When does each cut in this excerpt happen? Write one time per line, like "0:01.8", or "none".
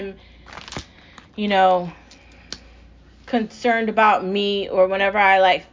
none